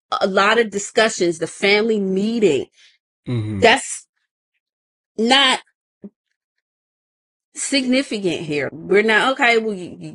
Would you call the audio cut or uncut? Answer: cut